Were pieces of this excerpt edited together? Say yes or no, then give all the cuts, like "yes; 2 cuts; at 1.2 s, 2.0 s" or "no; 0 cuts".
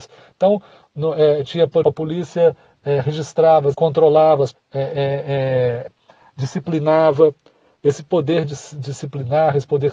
yes; 4 cuts; at 1.8 s, 3.7 s, 4.5 s, 5.9 s